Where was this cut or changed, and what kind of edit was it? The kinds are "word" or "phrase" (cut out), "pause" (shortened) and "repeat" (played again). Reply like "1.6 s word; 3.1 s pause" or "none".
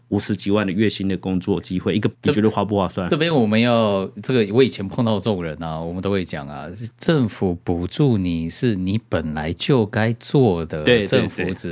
2.1 s word